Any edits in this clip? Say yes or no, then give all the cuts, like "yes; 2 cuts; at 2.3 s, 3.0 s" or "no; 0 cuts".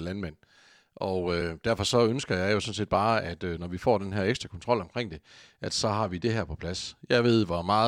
no; 0 cuts